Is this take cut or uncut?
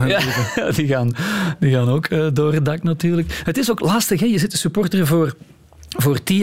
uncut